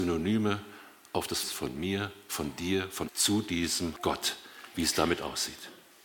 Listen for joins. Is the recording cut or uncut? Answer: cut